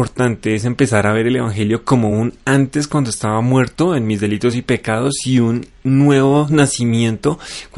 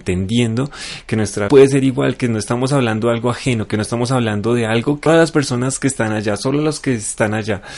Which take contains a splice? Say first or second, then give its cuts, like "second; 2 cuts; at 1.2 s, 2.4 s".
second; 2 cuts; at 1.5 s, 5.1 s